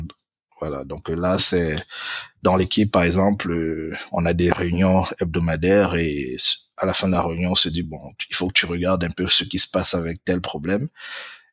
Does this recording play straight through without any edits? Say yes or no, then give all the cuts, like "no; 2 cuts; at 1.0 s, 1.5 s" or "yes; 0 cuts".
yes; 0 cuts